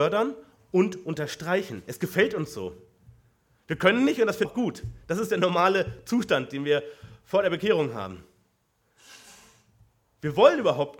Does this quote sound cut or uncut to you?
cut